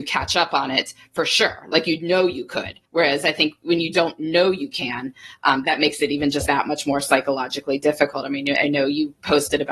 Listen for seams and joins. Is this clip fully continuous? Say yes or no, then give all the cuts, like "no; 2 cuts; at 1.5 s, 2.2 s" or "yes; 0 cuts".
no; 3 cuts; at 2.9 s, 5.6 s, 6.5 s